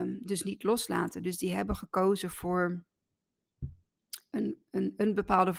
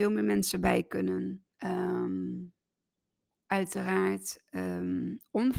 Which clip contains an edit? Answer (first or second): second